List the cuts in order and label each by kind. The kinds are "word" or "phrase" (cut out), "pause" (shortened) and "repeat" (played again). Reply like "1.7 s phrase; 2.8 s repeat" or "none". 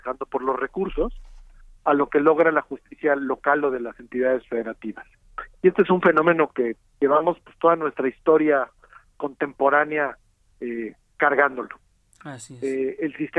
none